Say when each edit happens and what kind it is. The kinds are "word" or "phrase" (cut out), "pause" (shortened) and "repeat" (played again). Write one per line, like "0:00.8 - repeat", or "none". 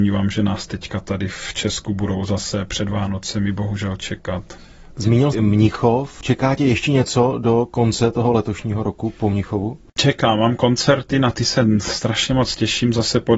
0:05.3 - word